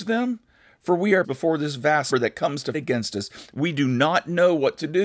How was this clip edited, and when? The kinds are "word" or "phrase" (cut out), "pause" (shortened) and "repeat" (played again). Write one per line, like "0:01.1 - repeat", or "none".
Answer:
0:01.2 - word
0:02.1 - word
0:02.7 - word